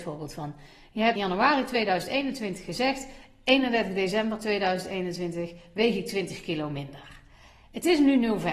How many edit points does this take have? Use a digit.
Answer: 1